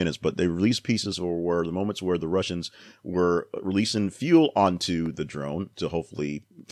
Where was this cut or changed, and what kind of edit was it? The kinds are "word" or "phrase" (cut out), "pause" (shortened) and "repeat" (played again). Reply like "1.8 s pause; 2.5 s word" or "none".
none